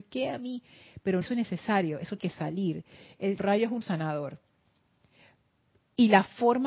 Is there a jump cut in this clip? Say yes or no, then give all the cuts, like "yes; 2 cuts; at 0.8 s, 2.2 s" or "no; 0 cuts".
yes; 4 cuts; at 1.2 s, 2.2 s, 3.4 s, 3.8 s